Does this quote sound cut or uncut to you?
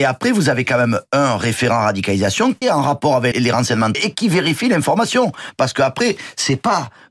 cut